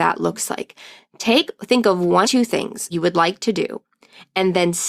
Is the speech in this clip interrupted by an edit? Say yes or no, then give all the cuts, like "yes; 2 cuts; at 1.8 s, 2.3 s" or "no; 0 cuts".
yes; 2 cuts; at 2.2 s, 2.9 s